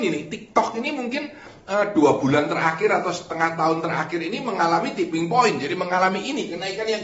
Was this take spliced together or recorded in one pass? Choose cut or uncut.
uncut